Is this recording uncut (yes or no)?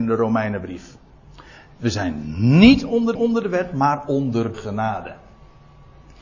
no